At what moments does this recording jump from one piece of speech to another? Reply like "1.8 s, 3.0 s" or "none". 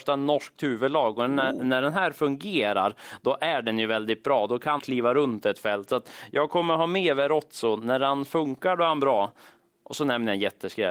4.8 s